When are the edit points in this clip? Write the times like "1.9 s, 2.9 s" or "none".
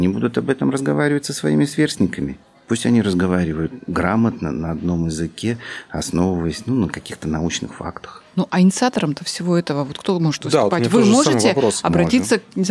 none